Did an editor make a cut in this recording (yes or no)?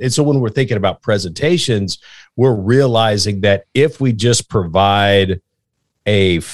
no